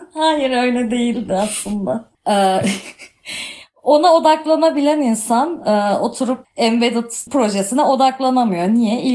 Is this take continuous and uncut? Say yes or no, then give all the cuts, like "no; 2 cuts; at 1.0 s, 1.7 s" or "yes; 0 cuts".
yes; 0 cuts